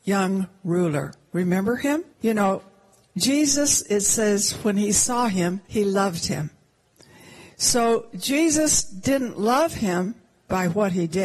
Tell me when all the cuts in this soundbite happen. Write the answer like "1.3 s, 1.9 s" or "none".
2.1 s, 5.6 s